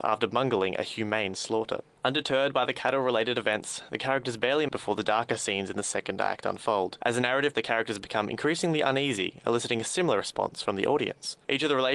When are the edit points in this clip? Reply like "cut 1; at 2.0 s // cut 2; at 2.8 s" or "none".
cut 1; at 4.7 s // cut 2; at 7.5 s